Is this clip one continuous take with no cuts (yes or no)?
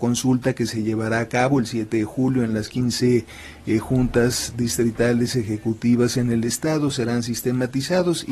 yes